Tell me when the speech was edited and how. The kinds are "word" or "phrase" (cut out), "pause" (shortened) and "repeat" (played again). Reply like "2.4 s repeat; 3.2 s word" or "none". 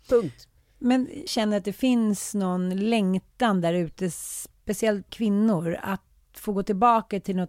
1.3 s word; 5.1 s word